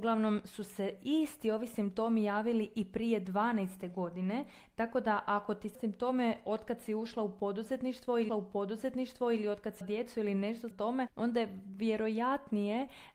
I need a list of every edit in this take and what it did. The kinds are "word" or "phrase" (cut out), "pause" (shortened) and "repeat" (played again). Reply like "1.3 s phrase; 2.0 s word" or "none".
5.7 s phrase; 8.3 s repeat; 9.8 s word; 10.7 s word